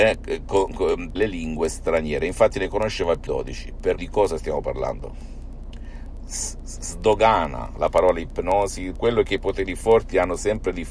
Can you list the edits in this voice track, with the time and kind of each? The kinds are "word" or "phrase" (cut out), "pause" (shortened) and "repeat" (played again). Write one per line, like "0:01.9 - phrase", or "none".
0:01.2 - phrase
0:03.3 - word
0:04.0 - word
0:08.9 - word